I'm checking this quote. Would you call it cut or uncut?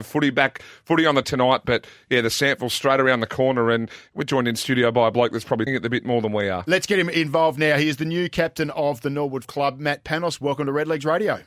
cut